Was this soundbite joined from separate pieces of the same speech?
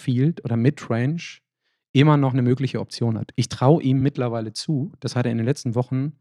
no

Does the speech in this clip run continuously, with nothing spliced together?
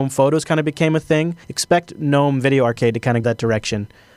no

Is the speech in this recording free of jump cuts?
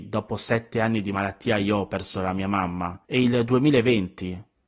no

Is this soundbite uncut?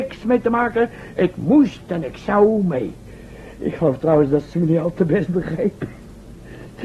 yes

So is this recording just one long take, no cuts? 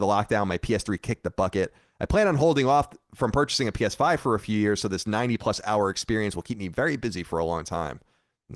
yes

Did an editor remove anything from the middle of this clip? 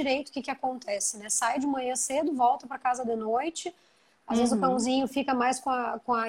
no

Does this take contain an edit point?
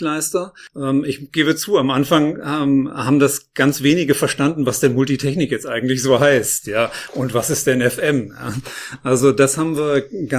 no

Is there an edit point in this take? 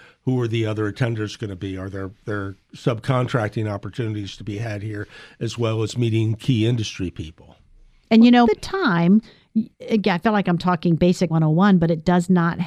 yes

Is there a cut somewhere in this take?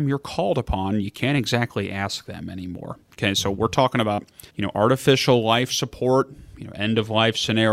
yes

